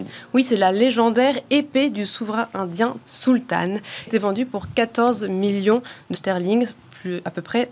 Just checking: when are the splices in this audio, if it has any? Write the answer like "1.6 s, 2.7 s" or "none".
3.0 s, 4.1 s, 6.1 s